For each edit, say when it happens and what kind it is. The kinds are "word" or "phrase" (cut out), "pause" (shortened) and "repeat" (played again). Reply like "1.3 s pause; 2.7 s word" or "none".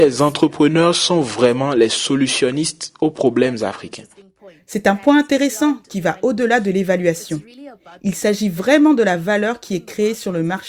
none